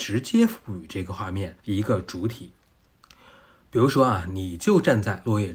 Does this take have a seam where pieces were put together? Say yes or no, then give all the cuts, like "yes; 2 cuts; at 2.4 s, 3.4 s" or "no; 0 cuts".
yes; 1 cut; at 1.6 s